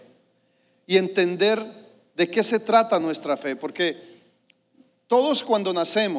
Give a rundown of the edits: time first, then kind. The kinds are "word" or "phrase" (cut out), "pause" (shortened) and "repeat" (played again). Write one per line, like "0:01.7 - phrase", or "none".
none

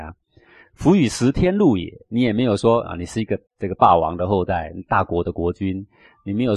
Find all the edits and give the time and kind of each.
0:03.5 - pause

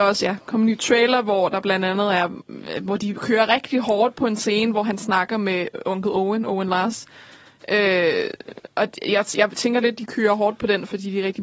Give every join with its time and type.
none

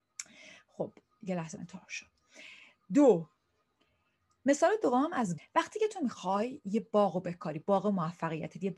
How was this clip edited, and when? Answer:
0:01.6 - word
0:05.4 - word

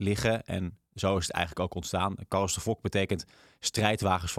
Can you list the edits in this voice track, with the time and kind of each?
none

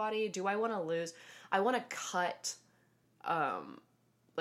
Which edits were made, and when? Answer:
none

